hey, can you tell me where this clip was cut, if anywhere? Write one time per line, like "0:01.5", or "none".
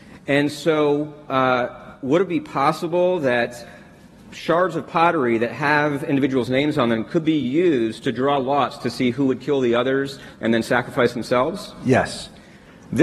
none